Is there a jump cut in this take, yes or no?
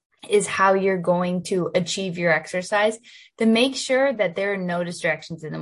no